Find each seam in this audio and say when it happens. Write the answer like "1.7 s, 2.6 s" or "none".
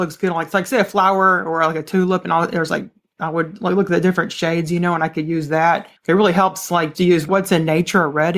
6.0 s, 6.9 s